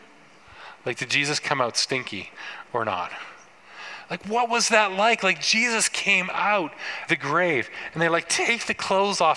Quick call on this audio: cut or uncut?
cut